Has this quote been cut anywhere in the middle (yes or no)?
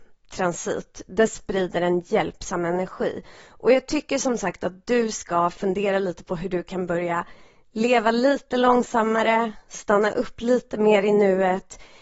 no